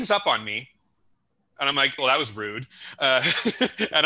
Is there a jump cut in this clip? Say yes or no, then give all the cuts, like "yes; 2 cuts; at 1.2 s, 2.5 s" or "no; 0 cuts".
yes; 1 cut; at 2.0 s